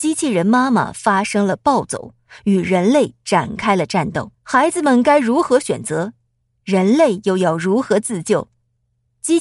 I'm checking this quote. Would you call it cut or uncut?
cut